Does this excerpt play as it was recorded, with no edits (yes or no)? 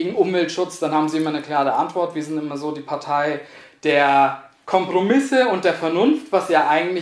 yes